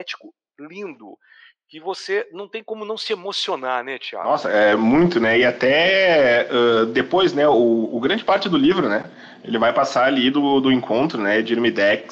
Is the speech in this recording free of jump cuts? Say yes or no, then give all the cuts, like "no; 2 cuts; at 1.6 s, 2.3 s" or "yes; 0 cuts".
yes; 0 cuts